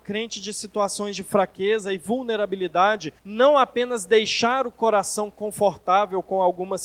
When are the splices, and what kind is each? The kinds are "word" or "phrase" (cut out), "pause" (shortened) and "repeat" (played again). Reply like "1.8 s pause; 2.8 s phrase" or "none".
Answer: 3.2 s pause